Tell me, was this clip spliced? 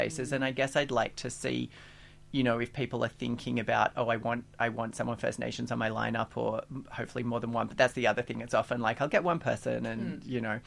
no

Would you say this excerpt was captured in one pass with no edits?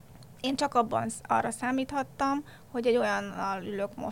yes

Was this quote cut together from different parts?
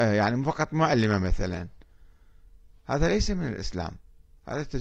no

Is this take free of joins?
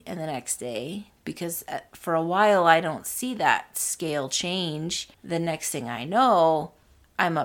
no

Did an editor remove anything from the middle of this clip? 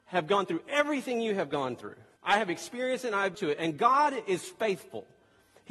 yes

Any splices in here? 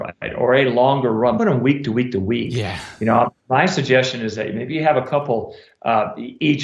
yes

